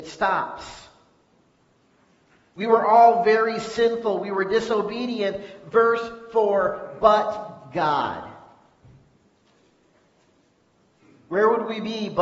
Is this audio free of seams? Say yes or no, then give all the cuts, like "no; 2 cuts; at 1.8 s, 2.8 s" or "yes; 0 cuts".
yes; 0 cuts